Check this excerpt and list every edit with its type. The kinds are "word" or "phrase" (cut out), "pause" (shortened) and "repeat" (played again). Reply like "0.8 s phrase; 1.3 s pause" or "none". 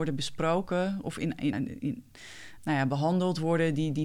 1.5 s word; 2.6 s word

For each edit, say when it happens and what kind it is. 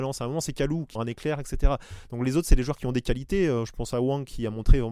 1.0 s phrase

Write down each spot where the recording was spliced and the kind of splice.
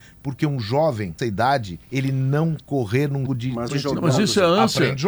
1.2 s word; 1.8 s pause; 2.6 s word; 3.3 s word; 3.7 s phrase

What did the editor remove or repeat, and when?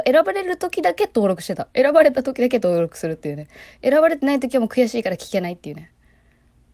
1.7 s pause

